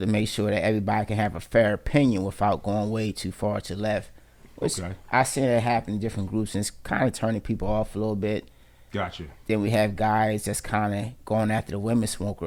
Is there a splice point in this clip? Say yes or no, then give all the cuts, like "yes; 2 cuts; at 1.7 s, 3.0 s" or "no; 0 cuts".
no; 0 cuts